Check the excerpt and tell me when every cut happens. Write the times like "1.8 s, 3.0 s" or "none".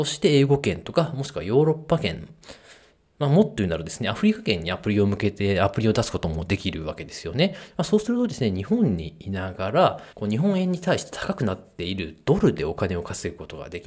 10.1 s